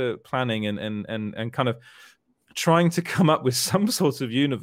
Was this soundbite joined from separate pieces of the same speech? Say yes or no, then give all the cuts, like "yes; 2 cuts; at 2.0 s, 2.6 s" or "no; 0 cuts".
no; 0 cuts